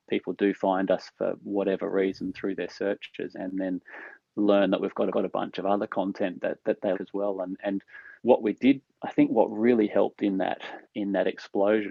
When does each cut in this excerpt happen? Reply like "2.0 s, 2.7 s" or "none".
3.3 s, 5.1 s, 6.9 s, 8.2 s, 10.8 s